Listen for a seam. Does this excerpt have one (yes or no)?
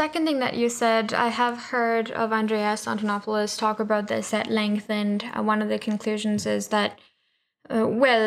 no